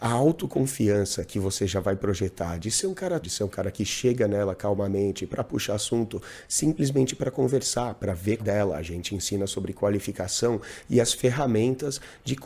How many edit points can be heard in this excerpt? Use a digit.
2